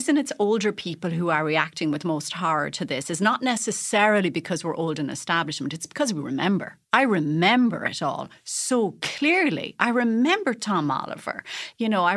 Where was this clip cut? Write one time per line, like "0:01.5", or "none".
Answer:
0:06.8